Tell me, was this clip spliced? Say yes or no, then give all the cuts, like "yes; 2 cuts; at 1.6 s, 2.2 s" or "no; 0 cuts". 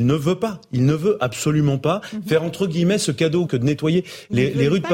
yes; 1 cut; at 3.5 s